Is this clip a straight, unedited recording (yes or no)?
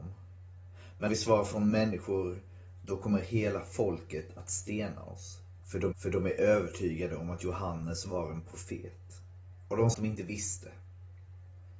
no